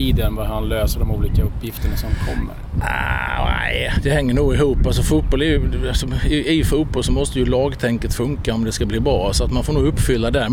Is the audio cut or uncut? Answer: uncut